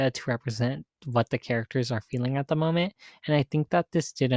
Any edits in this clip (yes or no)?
no